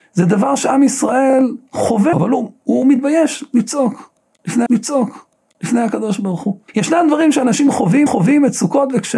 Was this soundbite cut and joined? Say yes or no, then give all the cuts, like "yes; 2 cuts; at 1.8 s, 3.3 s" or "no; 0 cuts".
yes; 4 cuts; at 2.1 s, 4.7 s, 6.7 s, 8.1 s